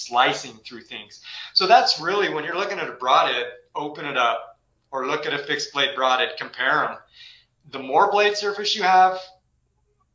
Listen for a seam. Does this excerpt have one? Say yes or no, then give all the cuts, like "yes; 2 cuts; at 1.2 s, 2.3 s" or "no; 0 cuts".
no; 0 cuts